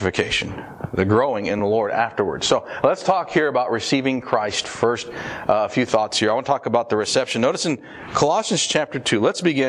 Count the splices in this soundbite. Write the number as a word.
zero